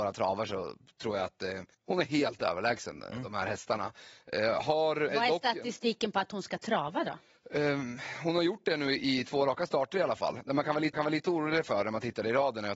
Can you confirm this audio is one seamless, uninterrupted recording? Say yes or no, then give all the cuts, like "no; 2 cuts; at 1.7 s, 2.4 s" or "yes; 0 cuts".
no; 3 cuts; at 1.7 s, 5.1 s, 10.9 s